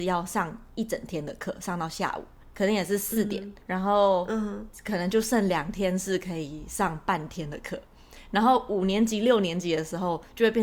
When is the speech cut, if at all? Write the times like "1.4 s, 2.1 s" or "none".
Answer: 2.4 s, 3.6 s